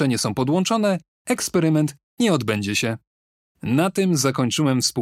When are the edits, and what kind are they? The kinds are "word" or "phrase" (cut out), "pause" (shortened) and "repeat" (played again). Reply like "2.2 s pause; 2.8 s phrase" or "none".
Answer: 3.2 s pause